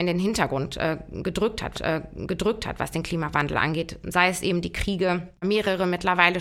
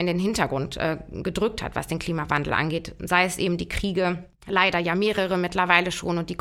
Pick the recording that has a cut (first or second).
first